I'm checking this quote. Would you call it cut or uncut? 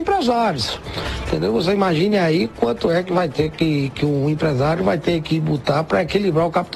uncut